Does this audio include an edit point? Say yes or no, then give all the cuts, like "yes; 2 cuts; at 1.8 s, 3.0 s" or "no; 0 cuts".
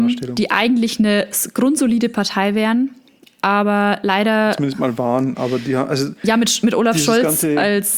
no; 0 cuts